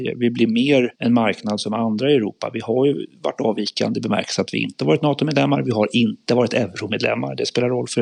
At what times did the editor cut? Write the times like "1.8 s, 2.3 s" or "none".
0.9 s, 3.1 s